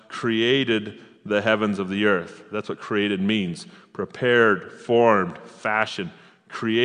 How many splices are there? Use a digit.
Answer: 0